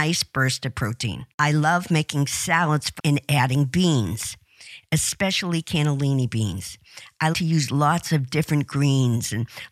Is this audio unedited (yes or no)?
no